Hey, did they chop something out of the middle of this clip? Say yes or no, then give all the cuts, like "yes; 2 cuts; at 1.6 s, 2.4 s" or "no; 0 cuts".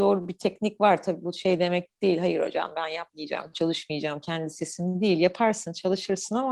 no; 0 cuts